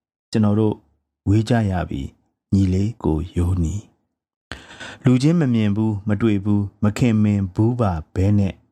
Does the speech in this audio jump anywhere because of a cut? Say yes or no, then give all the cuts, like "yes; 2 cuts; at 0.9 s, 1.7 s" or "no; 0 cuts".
yes; 1 cut; at 3.0 s